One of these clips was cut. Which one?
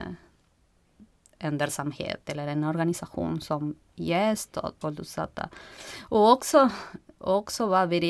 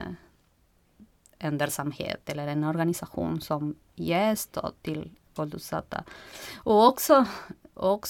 first; 1 cut; at 4.8 s

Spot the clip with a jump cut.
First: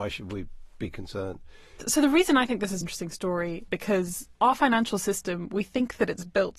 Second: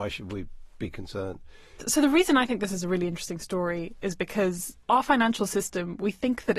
first; 2 cuts; at 2.8 s, 3.7 s

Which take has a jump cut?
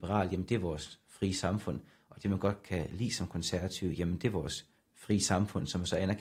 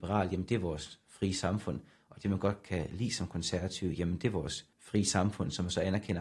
second; 1 cut; at 4.7 s

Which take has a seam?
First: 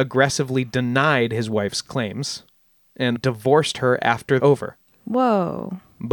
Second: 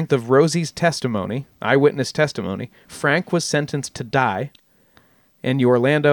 first; 2 cuts; at 3.2 s, 4.4 s

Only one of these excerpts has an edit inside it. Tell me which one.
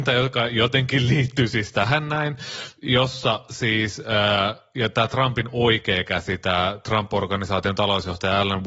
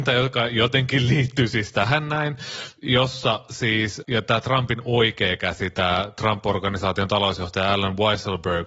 second; 1 cut; at 4.0 s

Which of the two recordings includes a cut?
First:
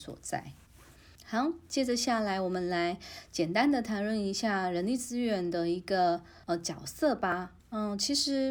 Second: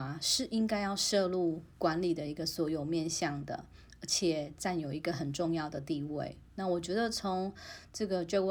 first; 3 cuts; at 1.2 s, 6.4 s, 7.6 s

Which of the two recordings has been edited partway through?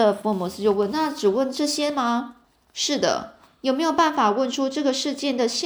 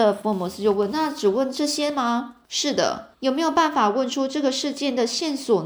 second; 2 cuts; at 2.4 s, 3.1 s

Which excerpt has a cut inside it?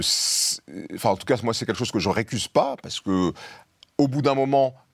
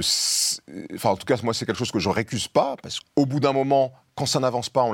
second; 1 cut; at 3.0 s

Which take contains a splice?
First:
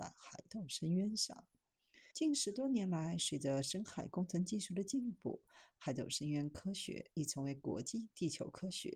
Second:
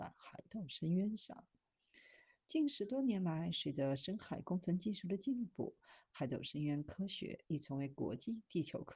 first; 1 cut; at 2.1 s

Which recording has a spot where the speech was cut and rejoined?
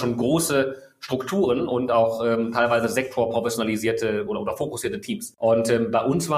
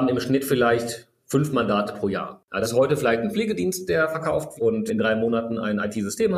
second; 3 cuts; at 2.6 s, 4.6 s, 4.9 s

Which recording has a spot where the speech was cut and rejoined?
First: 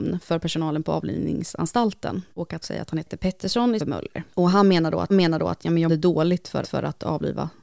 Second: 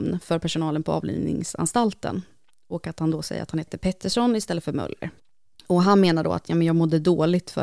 first; 7 cuts; at 2.3 s, 2.6 s, 3.8 s, 4.3 s, 5.1 s, 5.9 s, 6.6 s

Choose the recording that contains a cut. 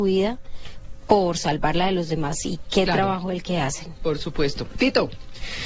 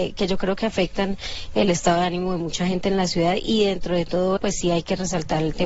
second; 1 cut; at 4.4 s

